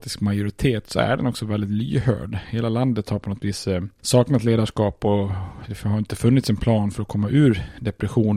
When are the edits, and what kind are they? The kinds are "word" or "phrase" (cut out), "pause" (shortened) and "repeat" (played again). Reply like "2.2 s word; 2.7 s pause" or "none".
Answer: none